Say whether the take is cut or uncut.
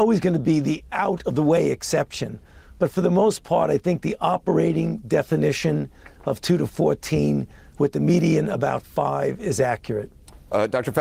uncut